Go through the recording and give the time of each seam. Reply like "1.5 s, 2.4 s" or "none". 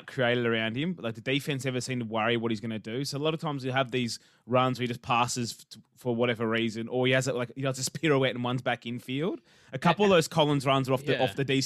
none